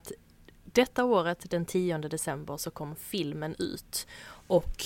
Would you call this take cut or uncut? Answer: uncut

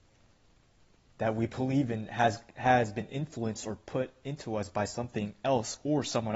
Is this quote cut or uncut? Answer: uncut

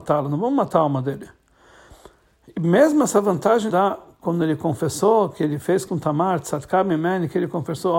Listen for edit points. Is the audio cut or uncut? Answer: cut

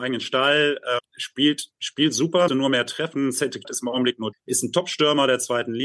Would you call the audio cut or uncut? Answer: cut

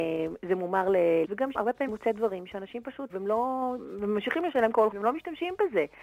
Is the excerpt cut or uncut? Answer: cut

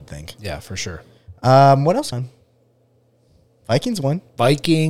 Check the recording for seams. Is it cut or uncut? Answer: cut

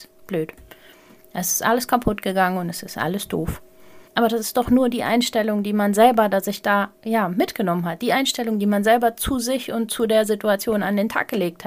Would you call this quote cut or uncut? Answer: cut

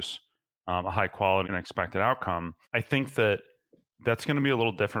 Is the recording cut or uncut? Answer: cut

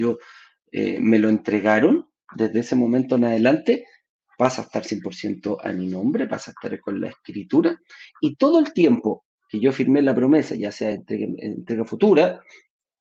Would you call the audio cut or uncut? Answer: uncut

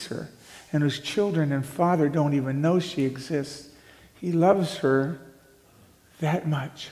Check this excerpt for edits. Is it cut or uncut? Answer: uncut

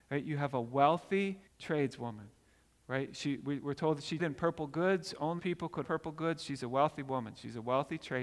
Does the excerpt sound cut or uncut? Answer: cut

